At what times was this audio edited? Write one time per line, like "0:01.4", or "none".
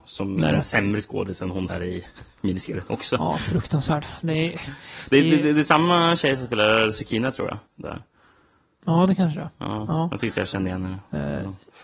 0:01.7
0:07.7